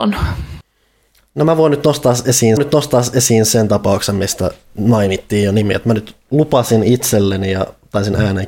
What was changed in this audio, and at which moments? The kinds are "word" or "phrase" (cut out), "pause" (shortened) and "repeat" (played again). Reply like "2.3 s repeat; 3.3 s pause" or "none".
2.6 s repeat